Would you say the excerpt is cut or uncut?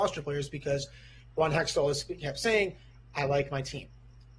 uncut